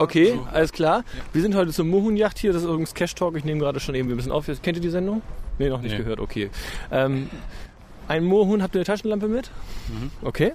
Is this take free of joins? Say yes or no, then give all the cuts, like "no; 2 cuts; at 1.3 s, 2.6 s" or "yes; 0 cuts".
yes; 0 cuts